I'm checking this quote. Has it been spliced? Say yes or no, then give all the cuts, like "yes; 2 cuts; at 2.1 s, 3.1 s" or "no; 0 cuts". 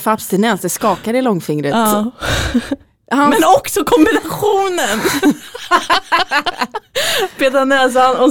no; 0 cuts